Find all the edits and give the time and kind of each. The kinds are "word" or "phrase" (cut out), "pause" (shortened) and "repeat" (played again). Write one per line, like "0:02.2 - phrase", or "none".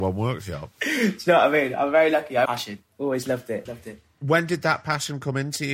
0:02.4 - phrase
0:03.7 - word